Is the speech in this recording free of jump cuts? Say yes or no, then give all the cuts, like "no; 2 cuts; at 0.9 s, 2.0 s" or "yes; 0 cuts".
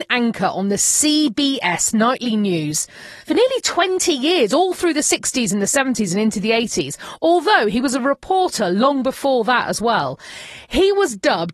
no; 1 cut; at 3.2 s